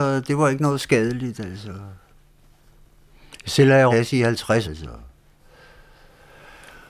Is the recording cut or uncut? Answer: cut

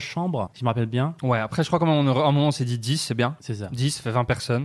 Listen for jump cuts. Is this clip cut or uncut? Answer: uncut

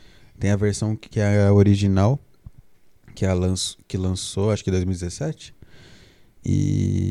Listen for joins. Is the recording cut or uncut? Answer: uncut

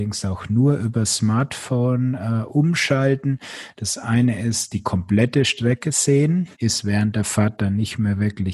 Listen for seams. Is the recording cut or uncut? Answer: cut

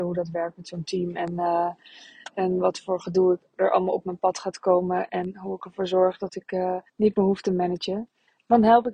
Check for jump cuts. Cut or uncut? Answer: cut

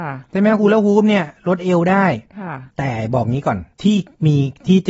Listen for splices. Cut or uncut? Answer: cut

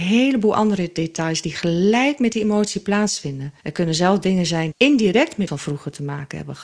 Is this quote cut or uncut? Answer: cut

